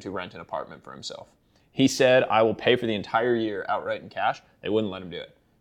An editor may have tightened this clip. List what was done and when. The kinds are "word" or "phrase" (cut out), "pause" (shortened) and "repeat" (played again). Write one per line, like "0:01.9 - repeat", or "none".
none